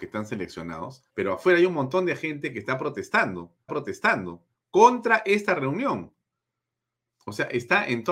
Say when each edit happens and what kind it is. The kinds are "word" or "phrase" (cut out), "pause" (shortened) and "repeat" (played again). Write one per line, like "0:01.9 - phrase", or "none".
0:01.1 - pause
0:03.7 - repeat